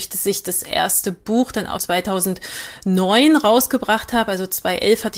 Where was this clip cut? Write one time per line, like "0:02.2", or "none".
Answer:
0:01.8